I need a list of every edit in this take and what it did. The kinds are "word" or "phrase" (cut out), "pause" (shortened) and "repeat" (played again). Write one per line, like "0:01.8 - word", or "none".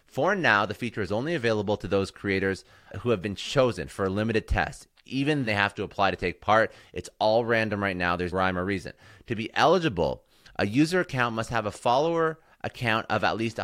0:02.9 - word
0:05.5 - word
0:08.3 - word